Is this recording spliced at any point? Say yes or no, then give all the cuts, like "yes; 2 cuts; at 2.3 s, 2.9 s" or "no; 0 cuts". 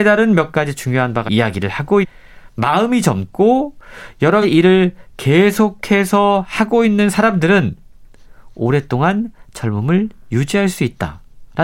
yes; 3 cuts; at 1.3 s, 2.0 s, 4.4 s